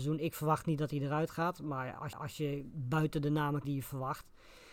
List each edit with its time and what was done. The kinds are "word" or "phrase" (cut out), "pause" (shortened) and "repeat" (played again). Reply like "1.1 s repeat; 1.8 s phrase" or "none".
2.1 s repeat; 3.6 s word